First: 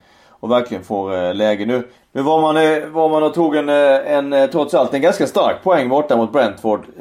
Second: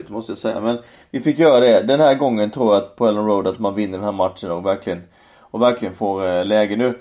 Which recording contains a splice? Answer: first; 1 cut; at 2.0 s

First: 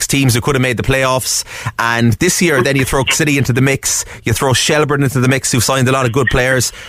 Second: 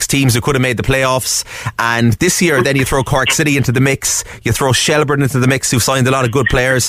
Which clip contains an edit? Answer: first; 1 cut; at 3.1 s

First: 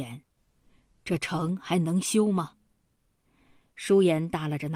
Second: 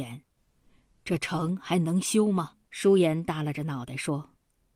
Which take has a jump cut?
second; 1 cut; at 2.6 s

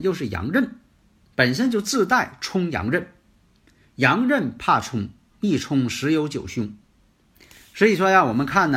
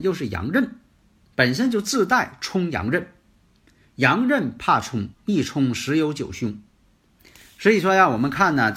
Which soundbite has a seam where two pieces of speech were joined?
second; 1 cut; at 5.1 s

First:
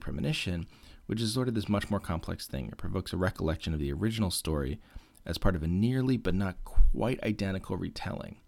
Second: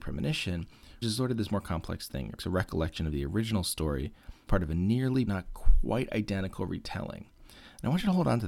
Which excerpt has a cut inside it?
second; 5 cuts; at 1.0 s, 1.5 s, 2.4 s, 4.5 s, 5.3 s

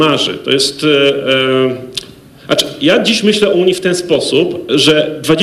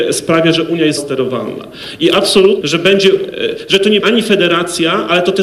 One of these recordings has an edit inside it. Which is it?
second; 3 cuts; at 1.0 s, 2.6 s, 4.0 s

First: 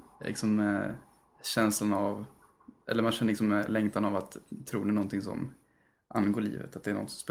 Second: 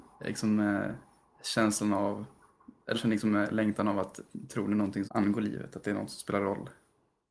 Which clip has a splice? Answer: second; 2 cuts; at 2.9 s, 5.0 s

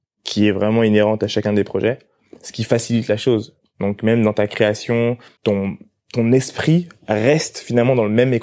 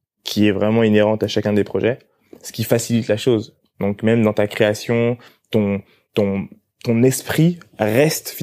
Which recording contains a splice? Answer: first; 1 cut; at 5.4 s

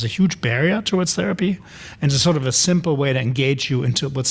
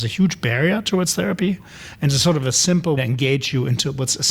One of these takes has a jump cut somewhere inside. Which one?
second; 1 cut; at 3.0 s

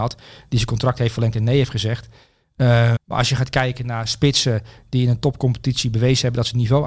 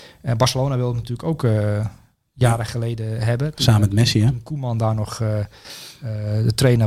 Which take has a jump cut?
first; 1 cut; at 3.0 s

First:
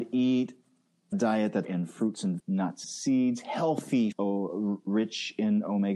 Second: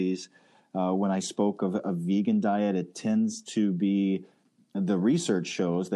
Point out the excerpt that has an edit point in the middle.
first; 5 cuts; at 1.1 s, 1.6 s, 2.4 s, 2.8 s, 4.1 s

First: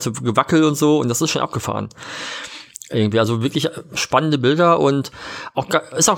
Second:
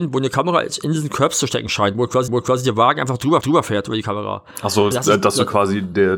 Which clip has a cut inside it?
second; 3 cuts; at 2.3 s, 3.4 s, 4.9 s

